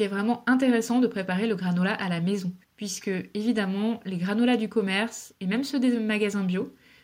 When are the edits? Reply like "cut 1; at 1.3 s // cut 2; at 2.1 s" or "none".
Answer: cut 1; at 2.6 s